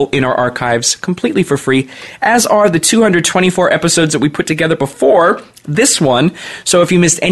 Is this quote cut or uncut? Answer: uncut